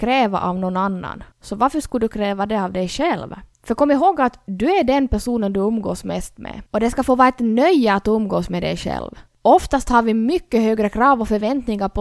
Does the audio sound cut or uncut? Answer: cut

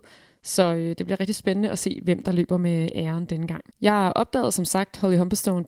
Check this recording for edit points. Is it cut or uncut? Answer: cut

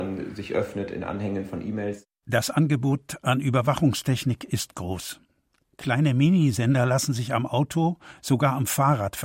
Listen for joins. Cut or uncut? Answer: uncut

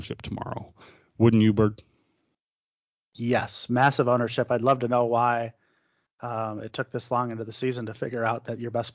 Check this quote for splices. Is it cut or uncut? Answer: uncut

